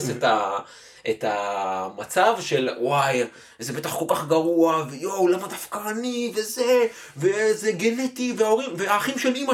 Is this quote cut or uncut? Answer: uncut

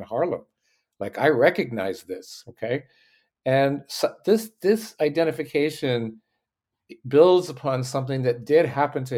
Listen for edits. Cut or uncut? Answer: uncut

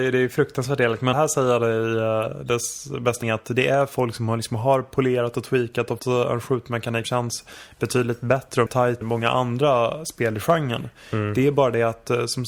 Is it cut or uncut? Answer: cut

